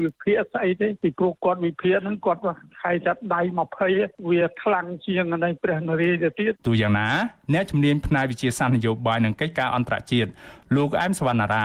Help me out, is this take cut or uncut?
cut